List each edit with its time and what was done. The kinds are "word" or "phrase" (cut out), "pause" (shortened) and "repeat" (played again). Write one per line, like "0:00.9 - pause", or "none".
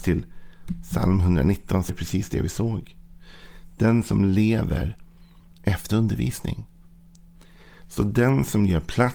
0:01.9 - word
0:05.9 - word